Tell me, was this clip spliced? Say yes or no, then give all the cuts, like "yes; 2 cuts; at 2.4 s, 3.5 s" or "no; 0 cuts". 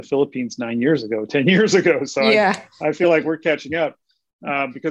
no; 0 cuts